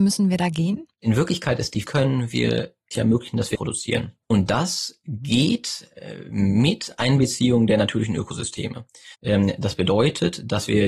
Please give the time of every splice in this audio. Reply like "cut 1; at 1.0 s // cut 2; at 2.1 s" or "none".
cut 1; at 0.9 s // cut 2; at 1.8 s // cut 3; at 2.9 s // cut 4; at 3.5 s // cut 5; at 4.2 s // cut 6; at 9.1 s